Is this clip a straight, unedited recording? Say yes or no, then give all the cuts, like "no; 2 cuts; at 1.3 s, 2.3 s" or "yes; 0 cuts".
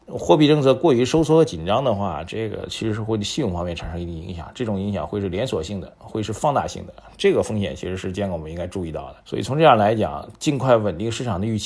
no; 1 cut; at 9.2 s